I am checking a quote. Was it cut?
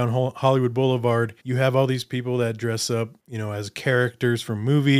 yes; 2 cuts; at 1.4 s, 3.2 s

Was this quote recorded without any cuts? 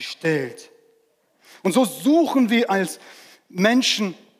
yes; 0 cuts

